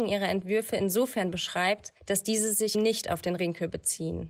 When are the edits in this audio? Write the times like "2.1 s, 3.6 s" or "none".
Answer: 2.0 s, 2.7 s, 3.4 s